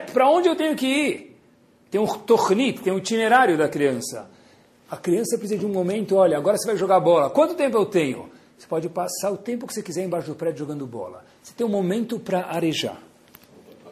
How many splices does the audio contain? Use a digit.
0